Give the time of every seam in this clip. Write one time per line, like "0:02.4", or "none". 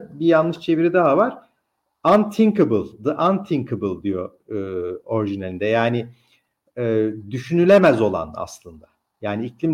none